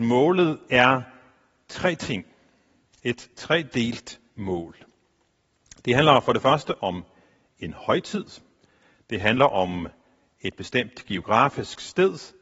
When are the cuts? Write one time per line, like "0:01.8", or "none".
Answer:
none

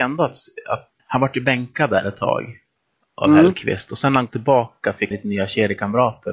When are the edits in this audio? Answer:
0:01.0
0:04.3
0:05.1

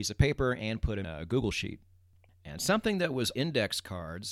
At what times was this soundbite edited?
0:01.0
0:03.4

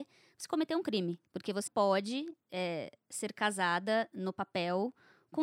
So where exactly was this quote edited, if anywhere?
0:01.3
0:01.7
0:02.4

